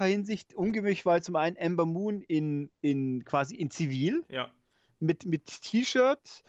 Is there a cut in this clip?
no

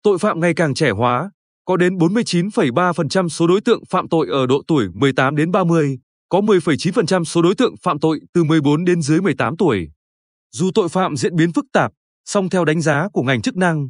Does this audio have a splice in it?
no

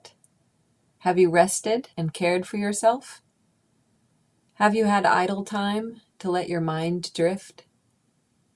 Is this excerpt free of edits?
no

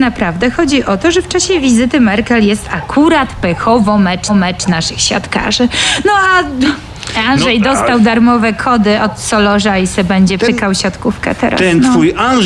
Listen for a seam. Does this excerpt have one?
yes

